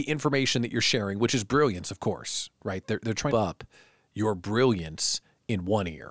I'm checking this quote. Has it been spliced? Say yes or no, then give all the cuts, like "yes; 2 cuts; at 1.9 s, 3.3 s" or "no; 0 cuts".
yes; 1 cut; at 3.3 s